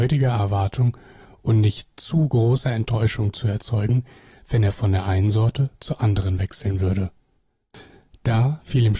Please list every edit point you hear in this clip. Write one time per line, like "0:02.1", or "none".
none

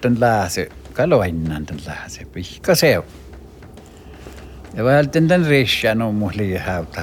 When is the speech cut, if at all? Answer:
none

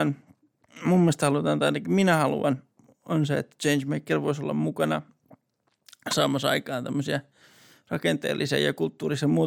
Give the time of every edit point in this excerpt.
none

